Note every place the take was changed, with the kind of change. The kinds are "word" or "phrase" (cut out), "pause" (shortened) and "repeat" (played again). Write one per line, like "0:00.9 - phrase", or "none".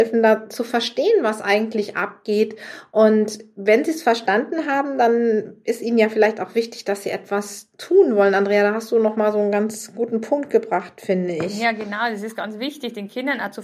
none